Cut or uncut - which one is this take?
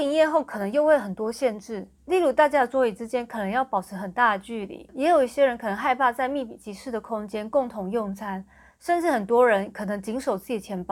uncut